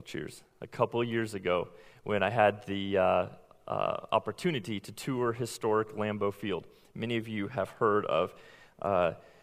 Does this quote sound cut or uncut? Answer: uncut